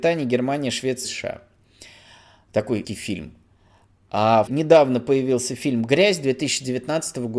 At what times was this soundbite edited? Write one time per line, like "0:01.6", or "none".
0:01.0
0:02.8
0:04.5